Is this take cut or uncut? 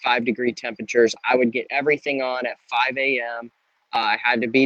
uncut